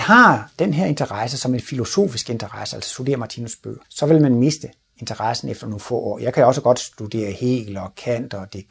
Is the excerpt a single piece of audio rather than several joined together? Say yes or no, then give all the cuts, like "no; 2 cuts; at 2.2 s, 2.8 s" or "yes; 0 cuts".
no; 1 cut; at 3.8 s